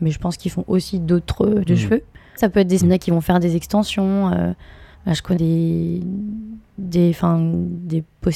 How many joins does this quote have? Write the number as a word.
five